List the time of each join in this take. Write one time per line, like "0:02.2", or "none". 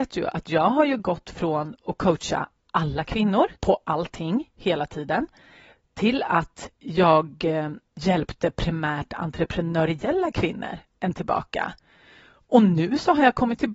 0:03.6
0:06.7
0:11.1